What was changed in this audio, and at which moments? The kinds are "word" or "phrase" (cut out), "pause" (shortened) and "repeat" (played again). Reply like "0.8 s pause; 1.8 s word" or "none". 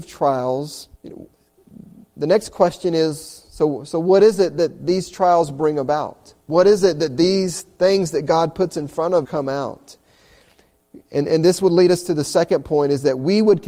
0.9 s pause; 6.4 s pause; 9.2 s phrase